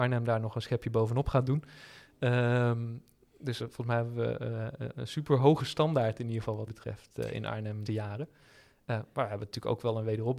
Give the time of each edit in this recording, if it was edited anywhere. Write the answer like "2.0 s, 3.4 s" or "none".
3.6 s, 6.7 s, 7.9 s